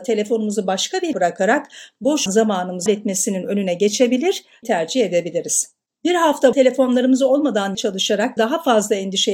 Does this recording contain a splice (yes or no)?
yes